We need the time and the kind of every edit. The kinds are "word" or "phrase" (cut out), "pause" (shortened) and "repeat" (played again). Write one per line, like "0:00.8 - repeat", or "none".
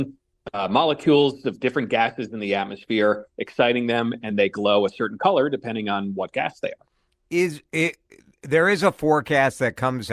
0:04.3 - word